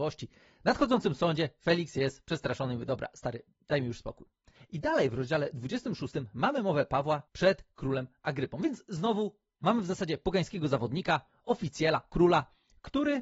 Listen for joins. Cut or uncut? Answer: uncut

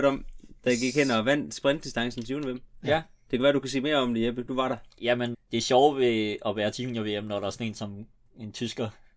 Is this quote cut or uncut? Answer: cut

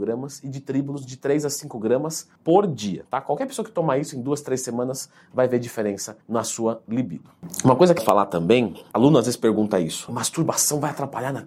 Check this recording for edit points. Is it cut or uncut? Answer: cut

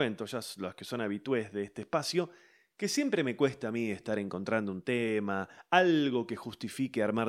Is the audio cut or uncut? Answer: uncut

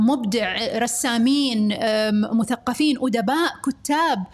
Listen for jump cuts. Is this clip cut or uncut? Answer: uncut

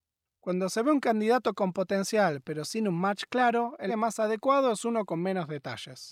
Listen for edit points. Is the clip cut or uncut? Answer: cut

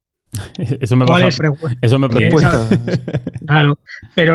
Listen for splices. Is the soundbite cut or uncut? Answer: cut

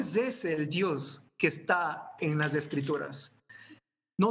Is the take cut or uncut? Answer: cut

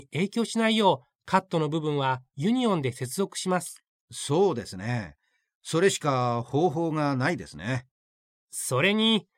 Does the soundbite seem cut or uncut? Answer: uncut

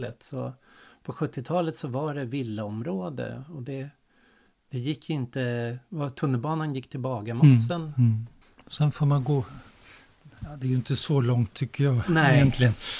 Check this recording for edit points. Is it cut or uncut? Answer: uncut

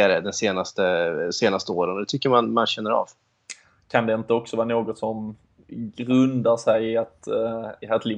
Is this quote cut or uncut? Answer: uncut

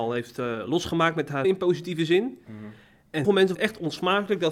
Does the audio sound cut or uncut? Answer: cut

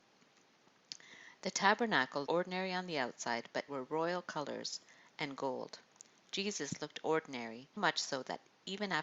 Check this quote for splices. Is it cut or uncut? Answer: cut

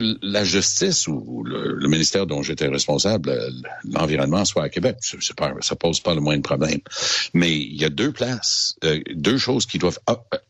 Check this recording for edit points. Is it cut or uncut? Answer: uncut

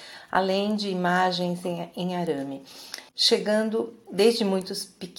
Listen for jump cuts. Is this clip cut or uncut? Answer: cut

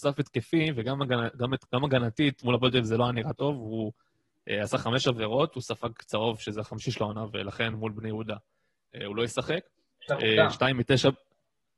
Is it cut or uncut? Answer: uncut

